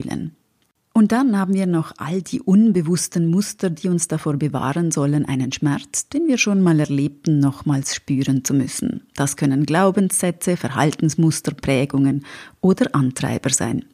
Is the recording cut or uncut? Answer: uncut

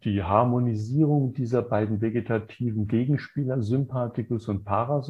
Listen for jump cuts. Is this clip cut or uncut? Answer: uncut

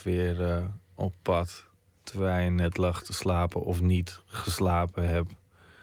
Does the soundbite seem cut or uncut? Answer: uncut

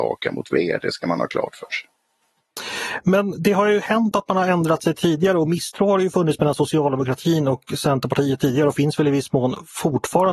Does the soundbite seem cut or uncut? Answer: uncut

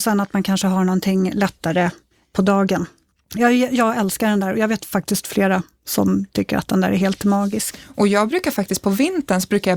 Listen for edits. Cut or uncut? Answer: uncut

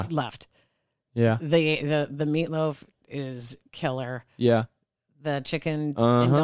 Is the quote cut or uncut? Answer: uncut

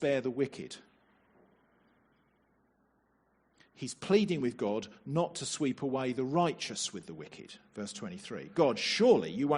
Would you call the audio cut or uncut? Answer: uncut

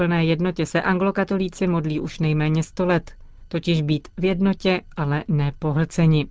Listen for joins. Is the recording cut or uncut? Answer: uncut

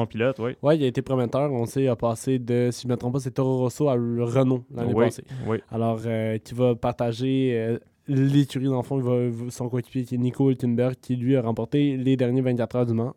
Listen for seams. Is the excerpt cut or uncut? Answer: uncut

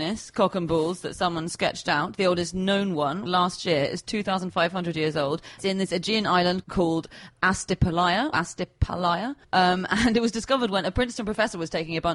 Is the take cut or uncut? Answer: cut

